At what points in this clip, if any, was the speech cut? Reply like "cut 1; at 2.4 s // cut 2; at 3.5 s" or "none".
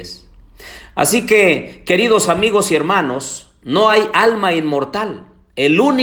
none